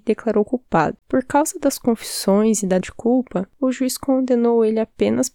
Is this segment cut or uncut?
cut